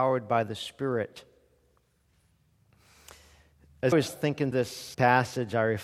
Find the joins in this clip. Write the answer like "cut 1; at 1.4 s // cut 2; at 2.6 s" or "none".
cut 1; at 3.9 s // cut 2; at 4.5 s // cut 3; at 4.9 s